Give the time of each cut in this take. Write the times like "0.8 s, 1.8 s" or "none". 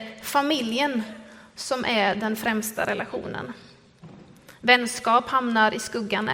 none